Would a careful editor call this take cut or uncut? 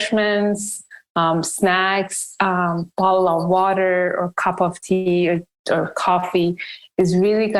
uncut